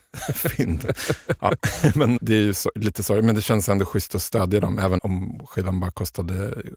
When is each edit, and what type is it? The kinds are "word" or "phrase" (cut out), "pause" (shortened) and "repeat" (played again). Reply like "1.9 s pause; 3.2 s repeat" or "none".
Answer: 2.2 s word; 5.0 s word